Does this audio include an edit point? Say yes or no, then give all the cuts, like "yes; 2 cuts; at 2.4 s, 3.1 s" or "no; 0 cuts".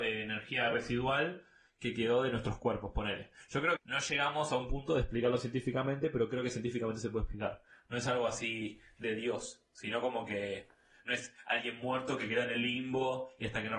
yes; 1 cut; at 3.8 s